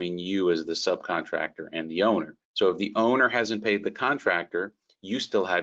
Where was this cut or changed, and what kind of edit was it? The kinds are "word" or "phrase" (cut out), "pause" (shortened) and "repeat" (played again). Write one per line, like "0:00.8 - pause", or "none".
0:02.4 - pause